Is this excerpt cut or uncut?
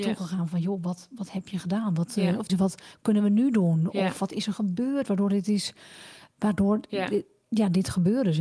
cut